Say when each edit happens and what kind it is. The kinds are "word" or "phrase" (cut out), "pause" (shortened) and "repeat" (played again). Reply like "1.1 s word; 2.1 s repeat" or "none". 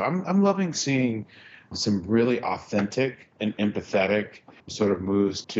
3.3 s pause; 4.6 s pause